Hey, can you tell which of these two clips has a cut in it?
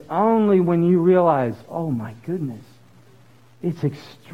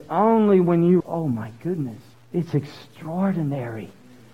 second; 2 cuts; at 1.0 s, 2.1 s

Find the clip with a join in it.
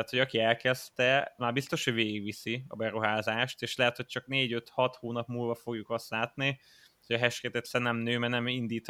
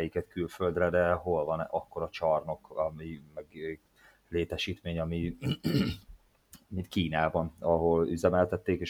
first; 1 cut; at 1.4 s

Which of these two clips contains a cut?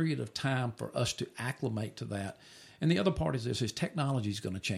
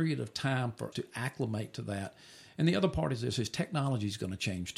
second; 1 cut; at 0.9 s

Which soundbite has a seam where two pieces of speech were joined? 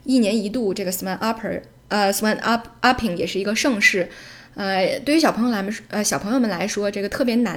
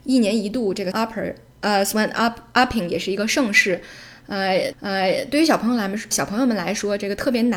second; 3 cuts; at 0.9 s, 4.7 s, 6.1 s

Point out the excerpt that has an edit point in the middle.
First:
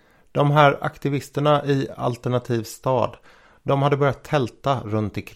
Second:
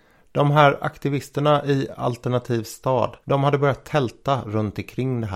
second; 1 cut; at 3.2 s

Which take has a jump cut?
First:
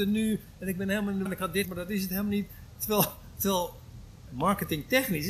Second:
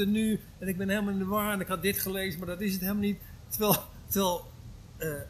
first; 3 cuts; at 1.3 s, 1.6 s, 4.3 s

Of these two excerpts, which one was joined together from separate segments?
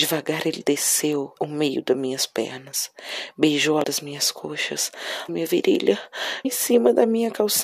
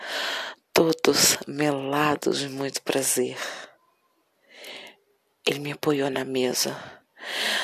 first; 4 cuts; at 1.4 s, 3.8 s, 5.3 s, 6.4 s

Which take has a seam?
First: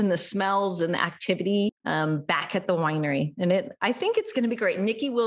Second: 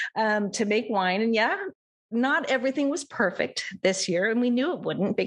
first; 1 cut; at 1.8 s

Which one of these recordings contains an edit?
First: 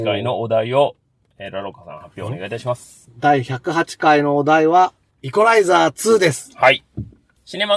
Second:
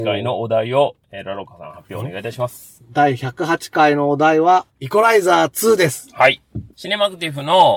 second; 3 cuts; at 1.0 s, 4.7 s, 6.7 s

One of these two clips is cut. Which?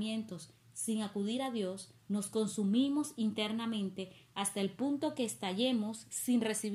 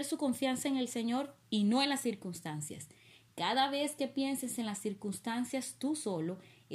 first; 1 cut; at 2.0 s

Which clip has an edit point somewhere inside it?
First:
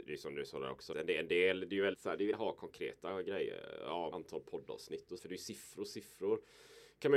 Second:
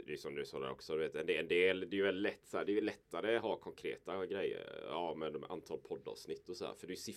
first; 5 cuts; at 0.9 s, 1.9 s, 2.3 s, 4.1 s, 5.2 s

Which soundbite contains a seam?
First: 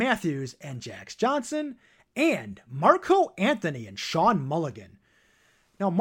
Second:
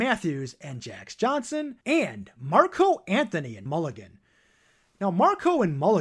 second; 2 cuts; at 1.8 s, 3.7 s

